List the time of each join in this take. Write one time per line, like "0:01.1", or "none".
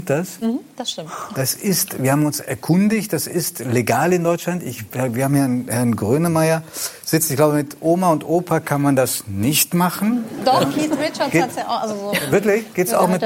none